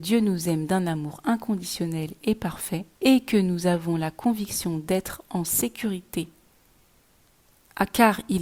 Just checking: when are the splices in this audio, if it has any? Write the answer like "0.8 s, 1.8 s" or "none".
2.9 s

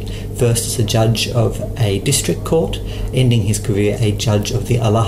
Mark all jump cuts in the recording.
3.1 s, 4.0 s

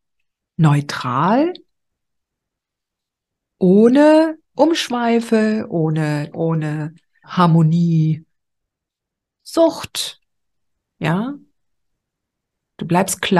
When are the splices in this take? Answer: 4.5 s, 6.3 s, 7.2 s

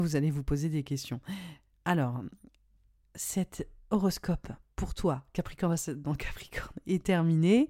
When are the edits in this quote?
none

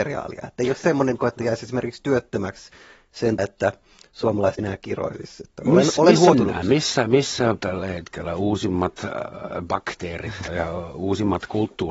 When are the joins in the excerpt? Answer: 1.2 s, 3.4 s, 4.6 s, 6.3 s, 7.6 s, 10.5 s

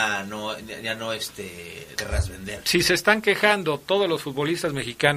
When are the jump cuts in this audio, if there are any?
1.9 s

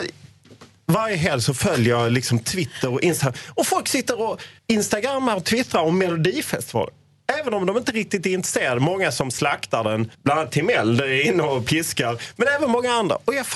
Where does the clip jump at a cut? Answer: 4.6 s, 10.1 s

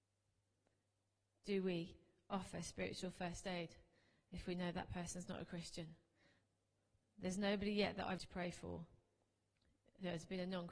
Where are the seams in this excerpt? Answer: 8.2 s

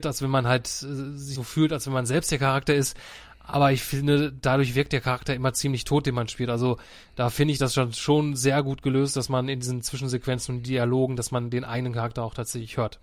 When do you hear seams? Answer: 1.4 s

